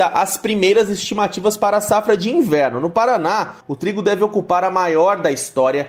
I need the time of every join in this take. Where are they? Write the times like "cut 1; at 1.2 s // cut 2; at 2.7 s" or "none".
cut 1; at 3.6 s